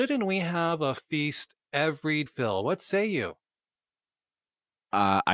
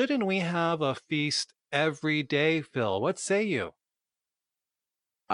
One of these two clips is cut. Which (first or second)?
first